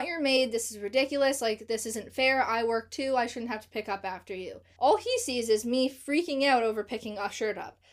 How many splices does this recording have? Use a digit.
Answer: 1